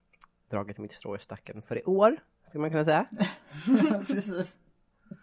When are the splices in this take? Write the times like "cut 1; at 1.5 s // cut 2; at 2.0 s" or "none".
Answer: none